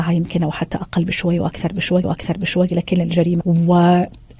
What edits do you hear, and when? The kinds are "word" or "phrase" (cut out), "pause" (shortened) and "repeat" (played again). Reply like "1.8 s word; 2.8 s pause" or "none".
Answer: 2.0 s repeat; 3.4 s word